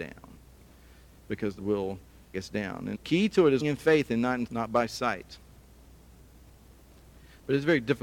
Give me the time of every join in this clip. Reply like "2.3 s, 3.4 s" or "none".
1.6 s, 2.3 s, 2.9 s, 3.6 s, 4.5 s